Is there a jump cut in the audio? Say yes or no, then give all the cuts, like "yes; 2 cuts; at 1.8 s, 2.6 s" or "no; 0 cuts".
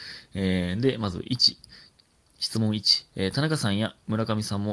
yes; 1 cut; at 3.1 s